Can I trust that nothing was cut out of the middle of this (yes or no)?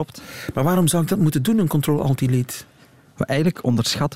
yes